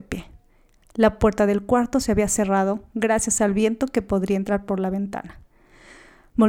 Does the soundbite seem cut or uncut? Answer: uncut